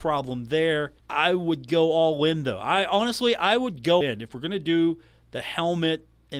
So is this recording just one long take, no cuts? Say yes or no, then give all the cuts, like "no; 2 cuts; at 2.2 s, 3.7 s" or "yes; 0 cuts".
no; 2 cuts; at 1.0 s, 4.0 s